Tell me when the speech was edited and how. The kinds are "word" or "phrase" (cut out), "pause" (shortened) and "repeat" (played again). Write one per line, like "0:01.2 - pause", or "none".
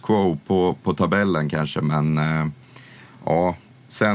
none